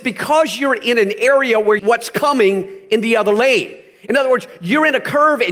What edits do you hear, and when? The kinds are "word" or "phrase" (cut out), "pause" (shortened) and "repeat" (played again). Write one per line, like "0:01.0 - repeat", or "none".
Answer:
0:01.8 - phrase